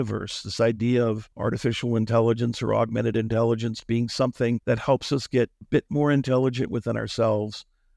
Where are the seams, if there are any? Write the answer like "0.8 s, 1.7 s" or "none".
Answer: 1.3 s, 4.6 s, 5.6 s